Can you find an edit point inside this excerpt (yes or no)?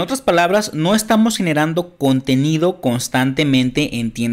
no